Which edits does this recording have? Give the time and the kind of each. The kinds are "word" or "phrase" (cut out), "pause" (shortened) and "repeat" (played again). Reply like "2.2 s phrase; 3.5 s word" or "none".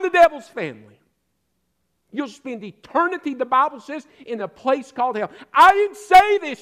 none